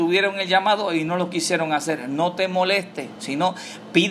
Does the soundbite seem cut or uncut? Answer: uncut